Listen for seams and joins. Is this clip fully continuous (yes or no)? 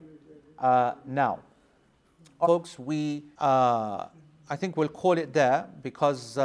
no